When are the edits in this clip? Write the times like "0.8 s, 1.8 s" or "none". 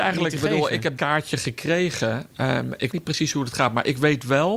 1.0 s, 2.9 s